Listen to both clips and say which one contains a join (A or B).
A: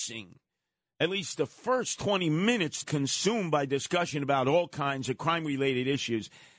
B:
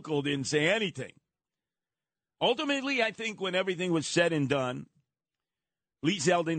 A